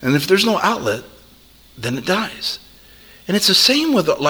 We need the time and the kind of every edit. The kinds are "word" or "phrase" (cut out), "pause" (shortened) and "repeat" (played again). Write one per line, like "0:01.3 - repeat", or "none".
none

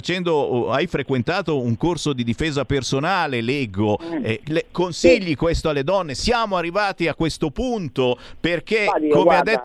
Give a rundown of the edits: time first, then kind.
none

